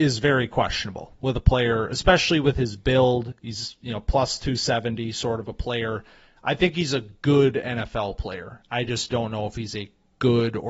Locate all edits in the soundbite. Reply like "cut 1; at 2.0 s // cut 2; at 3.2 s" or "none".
none